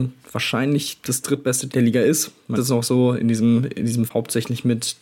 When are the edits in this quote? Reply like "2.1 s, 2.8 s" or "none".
1.7 s, 2.6 s, 4.1 s

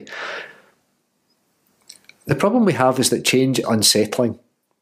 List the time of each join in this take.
3.6 s

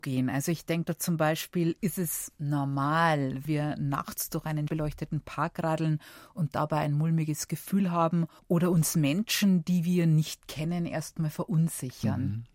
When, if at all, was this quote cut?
3.4 s, 4.7 s, 8.4 s

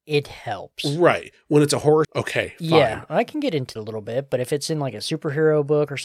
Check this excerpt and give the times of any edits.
2.0 s, 3.8 s

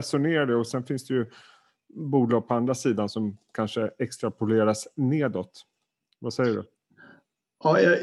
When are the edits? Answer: none

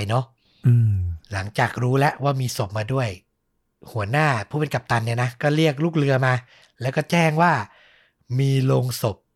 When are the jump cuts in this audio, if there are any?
1.2 s

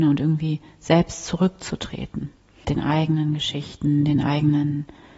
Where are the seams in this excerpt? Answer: 2.6 s

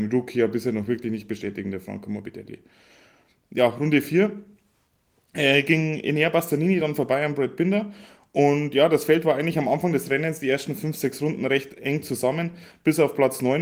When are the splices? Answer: none

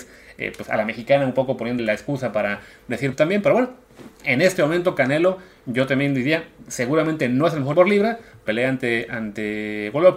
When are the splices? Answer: 1.8 s, 3.1 s, 4.1 s, 7.7 s, 8.5 s

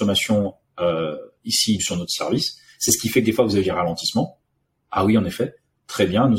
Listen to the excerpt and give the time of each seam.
1.8 s, 3.6 s

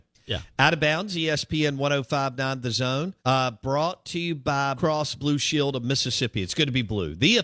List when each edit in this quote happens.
3.2 s, 4.8 s

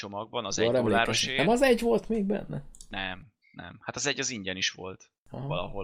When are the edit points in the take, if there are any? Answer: none

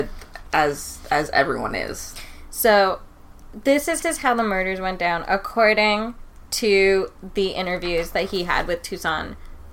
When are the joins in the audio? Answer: 4.0 s

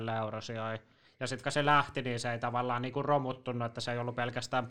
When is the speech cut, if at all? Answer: 1.4 s

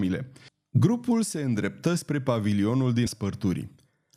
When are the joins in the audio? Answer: 3.1 s

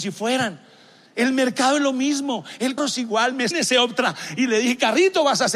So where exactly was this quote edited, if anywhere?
2.8 s, 3.5 s

